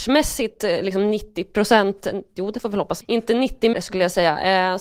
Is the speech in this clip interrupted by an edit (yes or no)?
yes